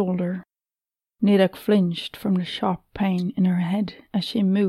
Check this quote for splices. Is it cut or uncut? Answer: uncut